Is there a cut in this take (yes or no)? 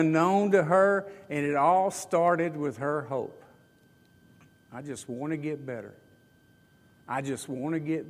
no